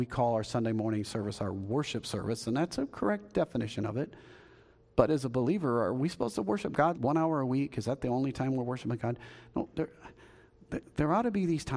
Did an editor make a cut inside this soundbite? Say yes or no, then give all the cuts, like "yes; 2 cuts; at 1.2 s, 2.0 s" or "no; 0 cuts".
yes; 1 cut; at 6.9 s